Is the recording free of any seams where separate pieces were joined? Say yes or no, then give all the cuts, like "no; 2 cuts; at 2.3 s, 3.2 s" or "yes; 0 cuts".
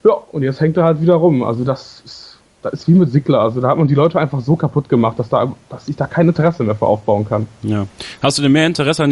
yes; 0 cuts